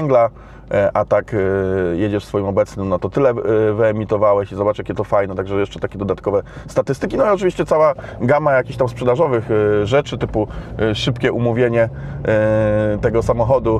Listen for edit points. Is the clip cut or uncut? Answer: uncut